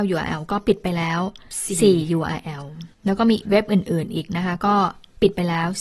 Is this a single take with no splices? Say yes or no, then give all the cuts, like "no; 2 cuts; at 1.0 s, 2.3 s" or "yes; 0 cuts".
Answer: no; 1 cut; at 2.9 s